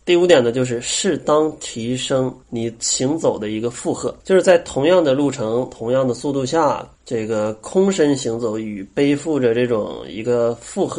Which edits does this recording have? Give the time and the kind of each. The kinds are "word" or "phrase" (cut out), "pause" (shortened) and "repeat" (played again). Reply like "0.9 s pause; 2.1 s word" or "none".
2.4 s pause; 4.2 s pause; 6.9 s pause